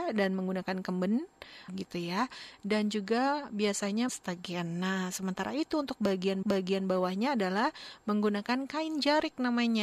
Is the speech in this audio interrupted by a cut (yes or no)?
yes